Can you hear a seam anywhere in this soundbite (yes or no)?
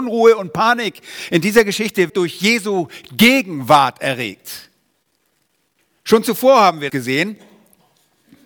yes